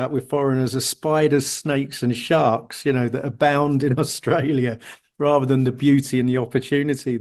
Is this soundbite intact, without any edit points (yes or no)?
yes